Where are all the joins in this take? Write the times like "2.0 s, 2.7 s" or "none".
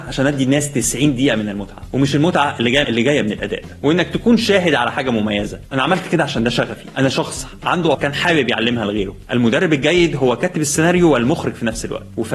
2.8 s, 8.0 s